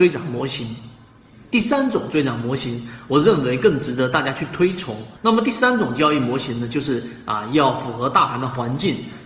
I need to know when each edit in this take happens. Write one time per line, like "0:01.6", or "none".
0:05.2